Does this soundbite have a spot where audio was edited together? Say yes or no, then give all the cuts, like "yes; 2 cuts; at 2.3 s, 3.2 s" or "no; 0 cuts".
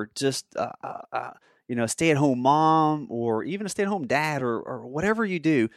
no; 0 cuts